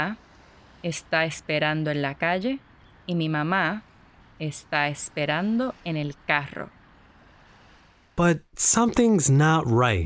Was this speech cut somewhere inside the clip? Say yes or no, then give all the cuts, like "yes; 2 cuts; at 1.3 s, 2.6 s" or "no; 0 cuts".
no; 0 cuts